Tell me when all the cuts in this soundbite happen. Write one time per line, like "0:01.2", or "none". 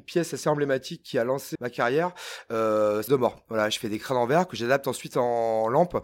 0:01.6
0:03.1

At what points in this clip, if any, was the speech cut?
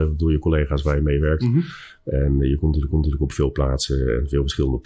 0:02.9

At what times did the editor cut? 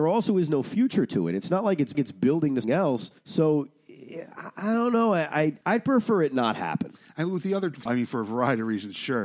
0:01.9
0:02.6
0:03.2
0:05.6
0:07.9

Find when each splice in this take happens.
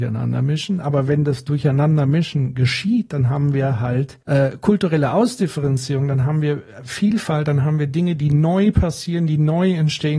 0:04.2

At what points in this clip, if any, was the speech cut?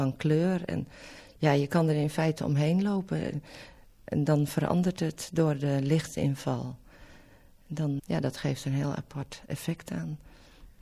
0:08.0

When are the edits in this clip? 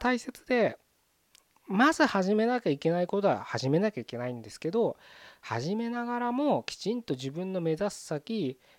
none

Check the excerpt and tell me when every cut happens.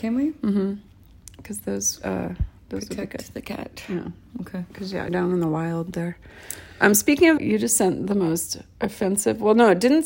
0:05.1
0:07.4

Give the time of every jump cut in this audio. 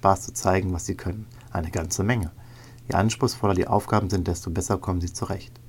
none

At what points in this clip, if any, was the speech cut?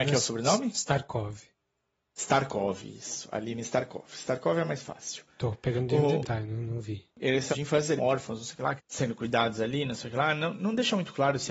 0:06.2
0:07.5
0:08.0
0:08.8

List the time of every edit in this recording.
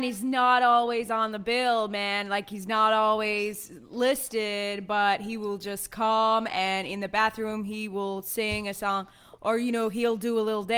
none

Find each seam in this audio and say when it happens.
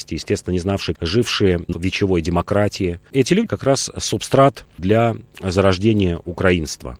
0:00.9
0:01.7
0:03.5
0:04.8

